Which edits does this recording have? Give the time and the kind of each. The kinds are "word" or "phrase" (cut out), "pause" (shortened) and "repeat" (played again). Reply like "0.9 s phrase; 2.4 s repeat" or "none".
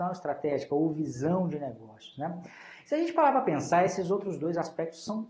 none